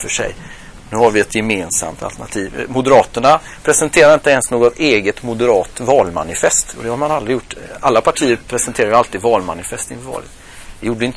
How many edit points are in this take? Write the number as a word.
zero